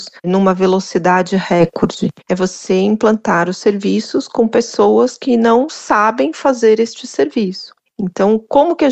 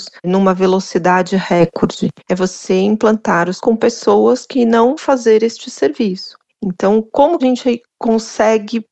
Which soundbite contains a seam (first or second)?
second